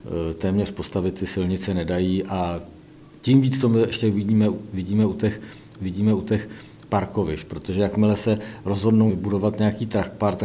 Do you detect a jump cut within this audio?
yes; 2 cuts; at 5.8 s, 9.1 s

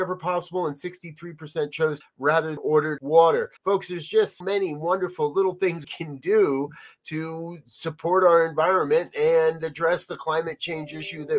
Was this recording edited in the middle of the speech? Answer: yes; 6 cuts; at 2.0 s, 2.6 s, 3.0 s, 3.6 s, 4.4 s, 5.8 s

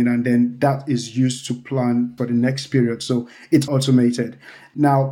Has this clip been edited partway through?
yes; 2 cuts; at 2.2 s, 3.7 s

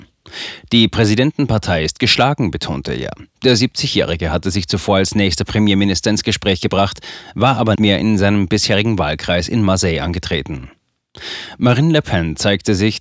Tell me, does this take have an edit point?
yes; 1 cut; at 7.8 s

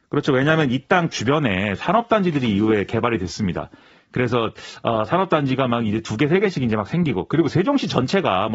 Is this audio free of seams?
yes; 0 cuts

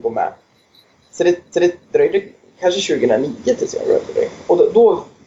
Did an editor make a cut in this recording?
yes; 2 cuts; at 1.5 s, 3.8 s

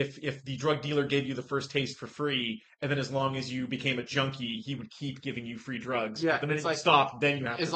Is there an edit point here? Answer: no; 0 cuts

